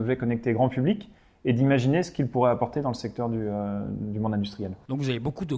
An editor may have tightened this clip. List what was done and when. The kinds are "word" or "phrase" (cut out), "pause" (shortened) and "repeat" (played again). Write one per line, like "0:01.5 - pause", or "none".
none